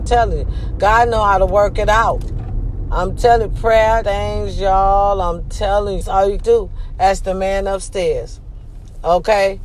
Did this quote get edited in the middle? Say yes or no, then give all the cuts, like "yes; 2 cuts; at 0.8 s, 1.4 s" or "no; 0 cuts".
yes; 3 cuts; at 4.0 s, 6.0 s, 6.4 s